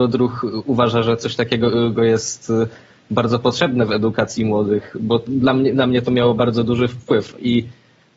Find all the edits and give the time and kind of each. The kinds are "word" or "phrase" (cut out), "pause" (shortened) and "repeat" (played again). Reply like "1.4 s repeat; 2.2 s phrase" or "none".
none